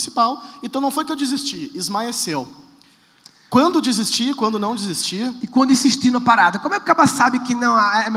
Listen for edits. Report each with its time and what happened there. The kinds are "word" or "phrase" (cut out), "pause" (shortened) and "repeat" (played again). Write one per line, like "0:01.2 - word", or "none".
none